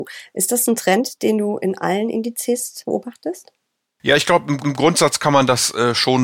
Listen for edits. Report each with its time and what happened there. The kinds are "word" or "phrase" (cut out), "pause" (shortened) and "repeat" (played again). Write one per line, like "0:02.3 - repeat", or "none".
0:04.6 - repeat